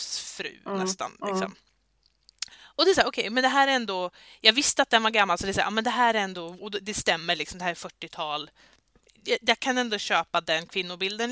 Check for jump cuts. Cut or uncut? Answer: uncut